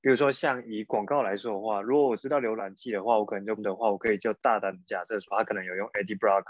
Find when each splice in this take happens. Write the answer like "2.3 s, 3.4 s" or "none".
3.6 s